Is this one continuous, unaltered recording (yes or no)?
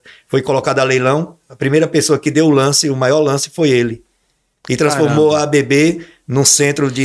yes